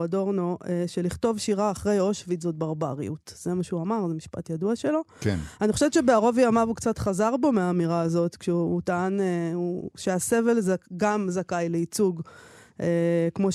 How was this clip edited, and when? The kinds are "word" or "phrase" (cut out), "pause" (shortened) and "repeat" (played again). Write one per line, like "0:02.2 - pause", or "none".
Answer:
none